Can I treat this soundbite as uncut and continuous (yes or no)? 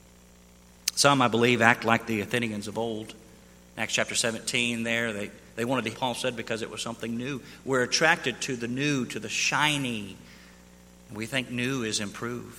no